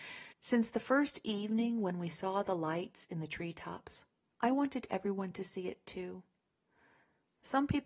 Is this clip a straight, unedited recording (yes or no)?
yes